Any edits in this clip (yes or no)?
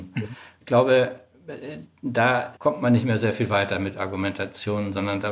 yes